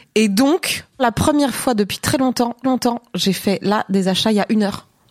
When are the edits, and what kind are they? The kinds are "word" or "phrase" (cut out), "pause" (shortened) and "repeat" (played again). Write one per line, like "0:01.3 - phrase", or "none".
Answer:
0:01.0 - word
0:02.6 - repeat